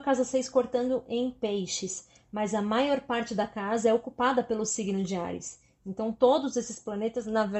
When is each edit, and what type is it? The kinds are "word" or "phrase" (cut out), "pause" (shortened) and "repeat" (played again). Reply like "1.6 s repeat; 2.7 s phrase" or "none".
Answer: none